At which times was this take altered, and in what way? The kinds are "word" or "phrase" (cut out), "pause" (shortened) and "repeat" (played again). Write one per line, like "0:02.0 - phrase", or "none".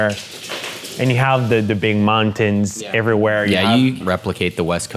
0:04.0 - word